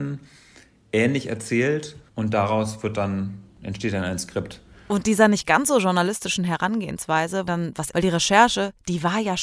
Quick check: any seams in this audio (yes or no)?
yes